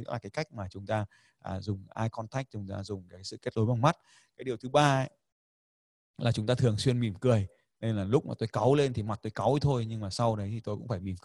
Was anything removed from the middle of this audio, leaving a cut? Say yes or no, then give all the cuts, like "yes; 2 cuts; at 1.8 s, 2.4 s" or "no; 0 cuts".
no; 0 cuts